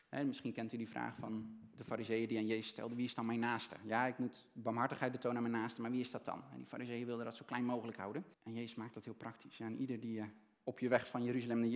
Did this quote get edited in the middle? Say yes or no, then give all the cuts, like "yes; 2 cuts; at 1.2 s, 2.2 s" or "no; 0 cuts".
yes; 1 cut; at 8.3 s